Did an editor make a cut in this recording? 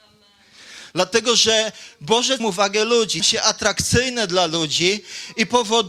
yes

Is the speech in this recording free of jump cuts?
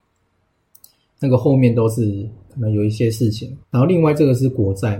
no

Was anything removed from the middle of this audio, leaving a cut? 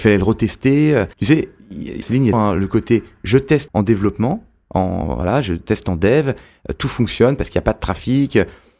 yes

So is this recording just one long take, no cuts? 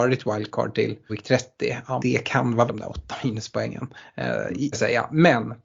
no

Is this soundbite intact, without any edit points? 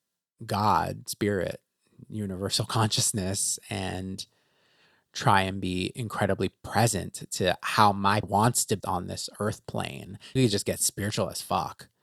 no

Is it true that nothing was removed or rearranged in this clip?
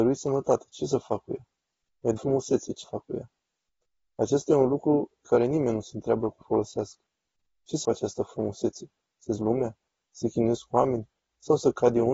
no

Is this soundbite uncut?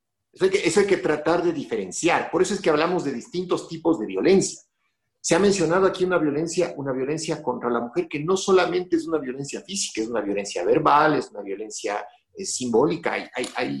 yes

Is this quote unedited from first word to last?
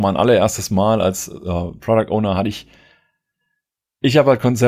yes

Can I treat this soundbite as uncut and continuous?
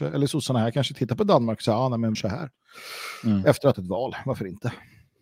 no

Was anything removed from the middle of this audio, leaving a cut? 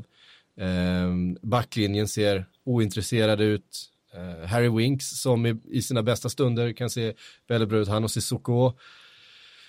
no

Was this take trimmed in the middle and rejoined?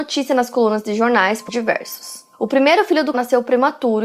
yes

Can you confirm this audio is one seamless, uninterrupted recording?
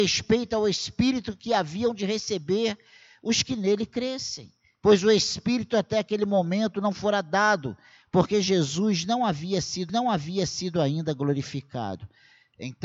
no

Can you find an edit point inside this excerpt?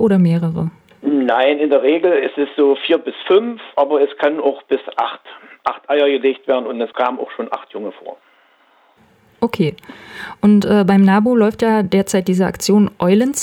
no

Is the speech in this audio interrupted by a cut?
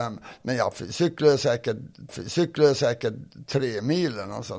yes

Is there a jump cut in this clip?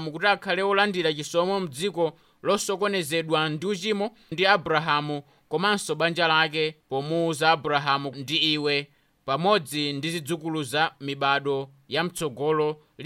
yes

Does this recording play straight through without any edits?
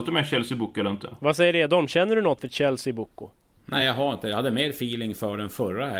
yes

